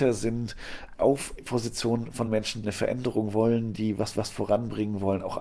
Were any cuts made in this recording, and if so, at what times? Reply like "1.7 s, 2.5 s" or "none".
1.4 s, 2.3 s, 2.6 s, 4.1 s